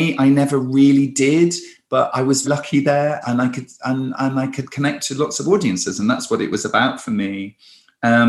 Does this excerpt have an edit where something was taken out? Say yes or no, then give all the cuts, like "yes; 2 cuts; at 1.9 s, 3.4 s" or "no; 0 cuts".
yes; 2 cuts; at 2.4 s, 3.2 s